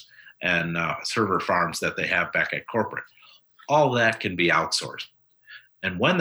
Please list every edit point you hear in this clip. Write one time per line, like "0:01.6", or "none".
none